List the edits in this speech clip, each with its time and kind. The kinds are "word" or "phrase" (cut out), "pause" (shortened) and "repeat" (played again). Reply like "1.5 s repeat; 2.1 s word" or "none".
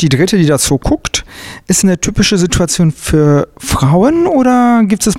1.8 s word